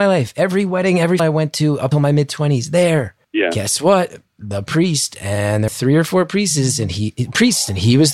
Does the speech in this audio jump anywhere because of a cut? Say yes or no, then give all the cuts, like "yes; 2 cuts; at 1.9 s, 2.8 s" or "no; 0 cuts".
yes; 5 cuts; at 1.2 s, 1.9 s, 3.2 s, 4.2 s, 5.7 s